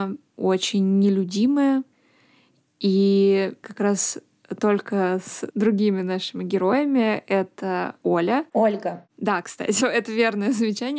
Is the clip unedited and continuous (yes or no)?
no